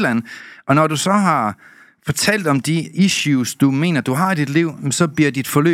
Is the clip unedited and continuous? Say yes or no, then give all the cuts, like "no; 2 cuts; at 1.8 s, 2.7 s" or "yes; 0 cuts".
yes; 0 cuts